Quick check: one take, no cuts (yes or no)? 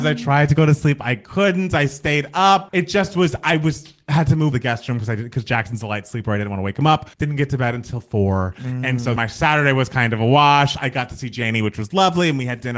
no